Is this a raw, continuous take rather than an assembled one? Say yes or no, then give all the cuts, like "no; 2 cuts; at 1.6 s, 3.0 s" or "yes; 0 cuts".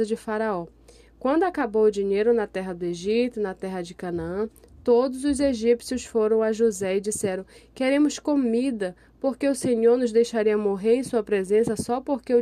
yes; 0 cuts